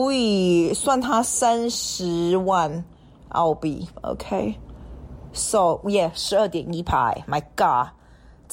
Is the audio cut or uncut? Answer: uncut